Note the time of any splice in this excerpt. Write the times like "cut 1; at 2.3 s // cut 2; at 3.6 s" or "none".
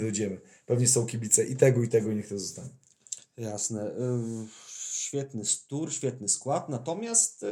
none